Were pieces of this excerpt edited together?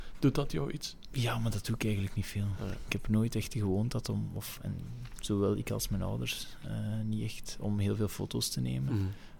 no; 0 cuts

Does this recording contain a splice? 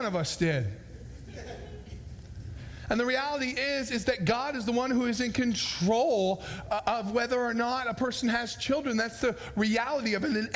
no; 0 cuts

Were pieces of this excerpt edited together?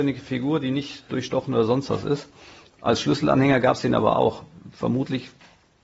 no; 0 cuts

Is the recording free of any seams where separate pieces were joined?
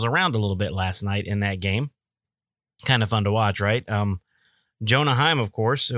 yes; 0 cuts

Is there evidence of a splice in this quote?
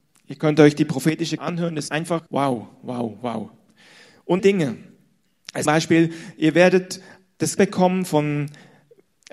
yes; 6 cuts; at 1.4 s, 1.9 s, 2.3 s, 4.4 s, 5.7 s, 7.6 s

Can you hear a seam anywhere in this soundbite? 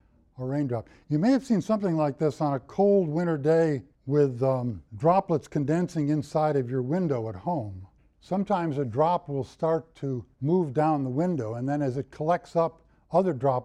yes; 4 cuts; at 3.9 s, 4.9 s, 8.0 s, 10.3 s

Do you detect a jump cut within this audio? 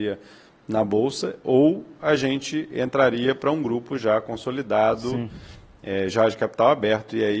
no; 0 cuts

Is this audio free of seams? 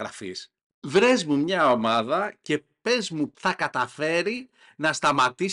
no; 1 cut; at 3.3 s

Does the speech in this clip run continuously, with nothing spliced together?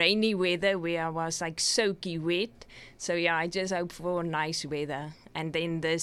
yes; 0 cuts

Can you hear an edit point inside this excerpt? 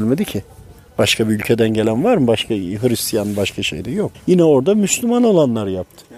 yes; 1 cut; at 4.1 s

